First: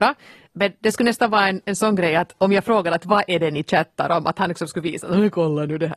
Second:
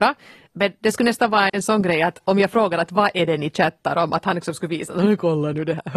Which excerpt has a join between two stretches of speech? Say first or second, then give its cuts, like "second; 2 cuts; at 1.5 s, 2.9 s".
second; 1 cut; at 1.5 s